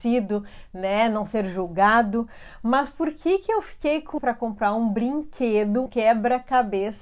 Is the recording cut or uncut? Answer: cut